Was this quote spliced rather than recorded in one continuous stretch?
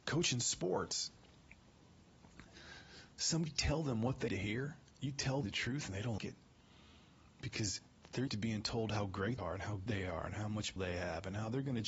yes; 8 cuts; at 3.5 s, 4.3 s, 5.4 s, 6.2 s, 8.3 s, 9.4 s, 9.9 s, 10.8 s

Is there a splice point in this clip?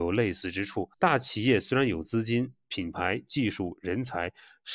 yes; 1 cut; at 0.9 s

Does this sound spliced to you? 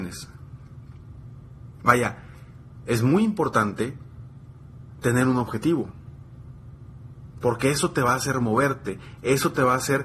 no; 0 cuts

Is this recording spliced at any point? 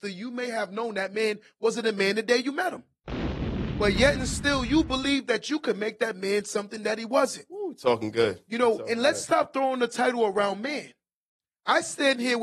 no; 0 cuts

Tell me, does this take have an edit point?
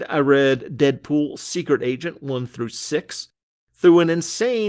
no; 0 cuts

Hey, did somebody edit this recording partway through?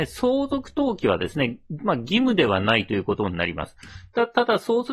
no; 0 cuts

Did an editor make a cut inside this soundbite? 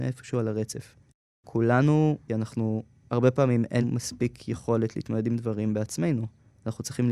yes; 3 cuts; at 2.3 s, 3.0 s, 3.8 s

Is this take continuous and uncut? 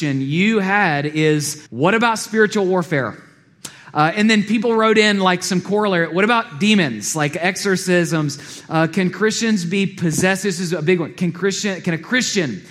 no; 1 cut; at 1.7 s

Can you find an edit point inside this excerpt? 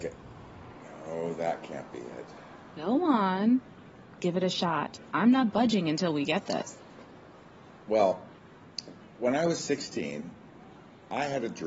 no; 0 cuts

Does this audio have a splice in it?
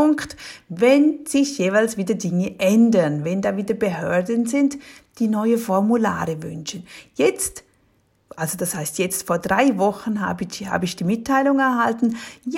no; 0 cuts

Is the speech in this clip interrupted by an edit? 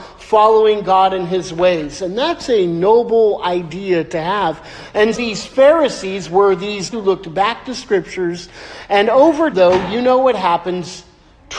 yes; 3 cuts; at 5.1 s, 6.9 s, 9.5 s

